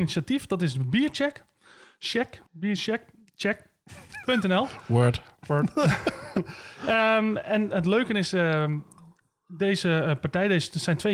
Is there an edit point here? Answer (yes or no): yes